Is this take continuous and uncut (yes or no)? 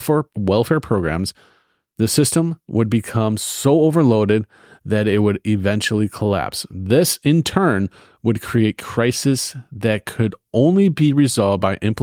yes